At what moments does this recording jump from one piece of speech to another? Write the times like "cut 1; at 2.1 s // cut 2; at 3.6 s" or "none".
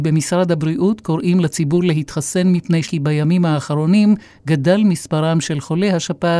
cut 1; at 2.8 s